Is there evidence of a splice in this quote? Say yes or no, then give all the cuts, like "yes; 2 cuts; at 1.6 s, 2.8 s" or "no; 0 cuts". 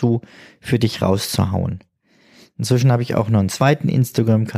no; 0 cuts